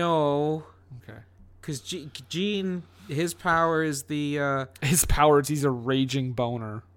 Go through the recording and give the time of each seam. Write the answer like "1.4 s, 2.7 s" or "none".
none